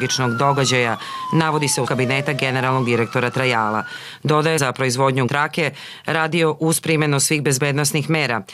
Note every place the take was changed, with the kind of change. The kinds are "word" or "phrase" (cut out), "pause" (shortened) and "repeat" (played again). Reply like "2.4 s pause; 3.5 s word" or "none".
1.9 s word; 4.6 s phrase; 5.3 s word

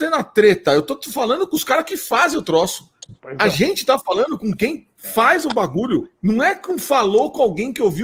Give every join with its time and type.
3.2 s pause; 6.1 s pause

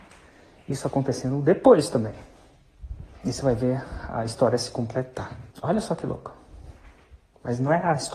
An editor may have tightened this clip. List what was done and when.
3.1 s pause; 5.5 s pause

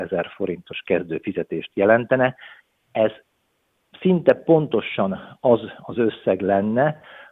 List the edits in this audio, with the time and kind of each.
none

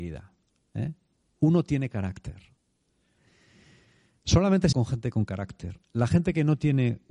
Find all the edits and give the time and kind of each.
4.7 s phrase

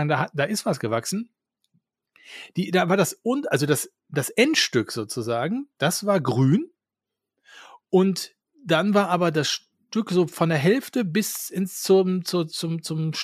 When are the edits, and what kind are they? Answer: none

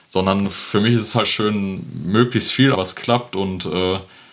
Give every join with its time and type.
1.2 s word; 2.7 s phrase

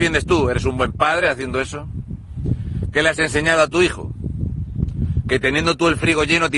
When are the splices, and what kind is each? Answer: none

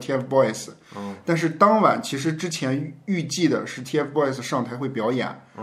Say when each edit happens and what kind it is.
none

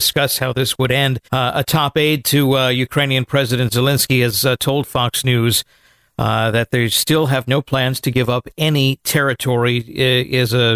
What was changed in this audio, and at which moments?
1.2 s pause

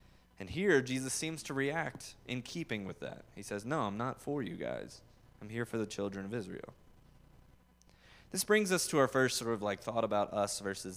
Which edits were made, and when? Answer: none

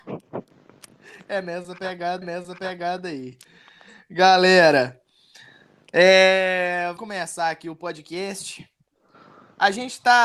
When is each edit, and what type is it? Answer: 2.2 s repeat; 7.0 s word

